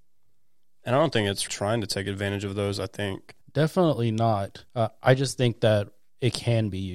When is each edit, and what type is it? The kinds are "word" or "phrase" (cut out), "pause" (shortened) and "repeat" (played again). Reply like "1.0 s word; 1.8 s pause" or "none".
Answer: 1.5 s word; 3.4 s pause; 4.7 s pause